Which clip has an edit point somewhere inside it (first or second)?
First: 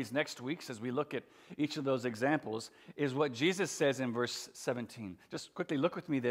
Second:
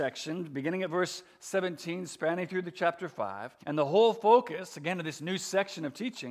second